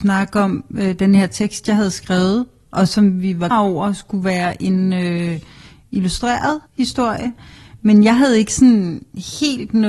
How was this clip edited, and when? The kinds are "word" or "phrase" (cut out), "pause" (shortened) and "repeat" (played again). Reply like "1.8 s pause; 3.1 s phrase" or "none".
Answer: 3.5 s word; 6.7 s pause